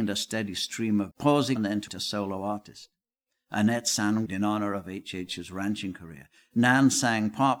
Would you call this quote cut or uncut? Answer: cut